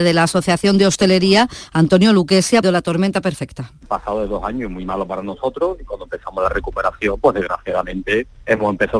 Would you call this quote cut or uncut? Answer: cut